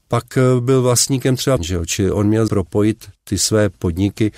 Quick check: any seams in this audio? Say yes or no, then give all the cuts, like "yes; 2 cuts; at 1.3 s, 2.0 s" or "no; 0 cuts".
yes; 3 cuts; at 1.6 s, 2.5 s, 3.2 s